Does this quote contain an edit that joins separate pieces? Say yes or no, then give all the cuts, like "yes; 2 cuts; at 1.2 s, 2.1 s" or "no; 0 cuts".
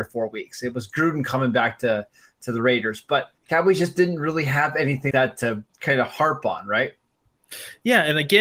yes; 3 cuts; at 3.4 s, 5.1 s, 5.7 s